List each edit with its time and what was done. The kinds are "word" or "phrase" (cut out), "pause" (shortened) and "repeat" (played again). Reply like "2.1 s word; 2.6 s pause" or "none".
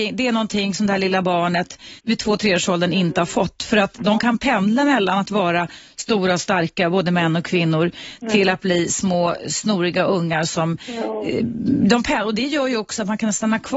2.0 s pause